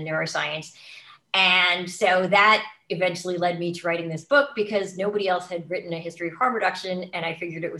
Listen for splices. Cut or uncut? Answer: uncut